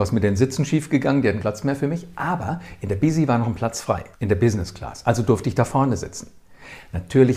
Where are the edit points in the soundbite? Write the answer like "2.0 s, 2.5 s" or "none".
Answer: 1.4 s, 4.1 s

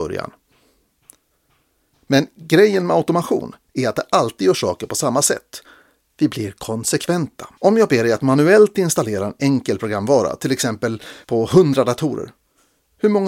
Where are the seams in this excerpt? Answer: 7.6 s, 11.2 s

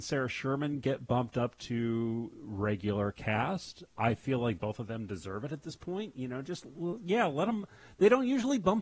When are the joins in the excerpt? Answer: none

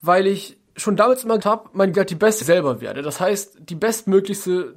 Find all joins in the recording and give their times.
1.4 s, 1.9 s, 2.4 s

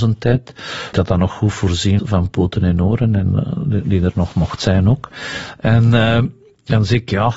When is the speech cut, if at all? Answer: 0.9 s, 2.0 s

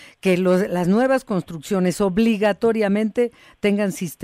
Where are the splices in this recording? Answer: none

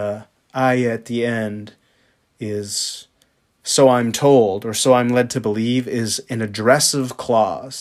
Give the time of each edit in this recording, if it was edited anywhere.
none

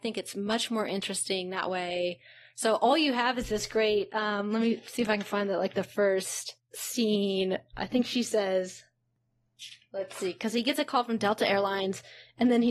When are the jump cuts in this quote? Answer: none

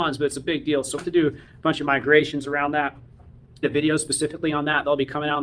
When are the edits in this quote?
1.0 s, 3.6 s

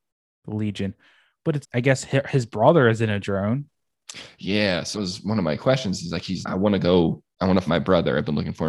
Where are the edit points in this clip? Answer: 1.6 s, 4.9 s, 6.4 s, 7.7 s

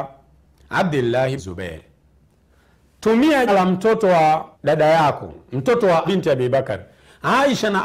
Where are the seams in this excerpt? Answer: 1.4 s, 3.5 s, 4.5 s, 6.0 s

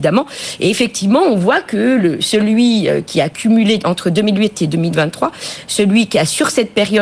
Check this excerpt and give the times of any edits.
none

